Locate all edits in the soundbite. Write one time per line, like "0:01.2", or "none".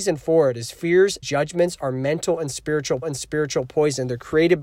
0:01.2
0:03.0